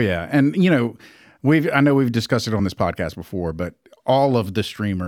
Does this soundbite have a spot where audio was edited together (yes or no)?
no